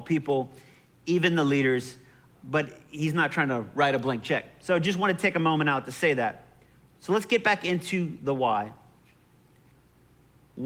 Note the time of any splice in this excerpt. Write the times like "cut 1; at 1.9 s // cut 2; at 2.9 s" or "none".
cut 1; at 2.3 s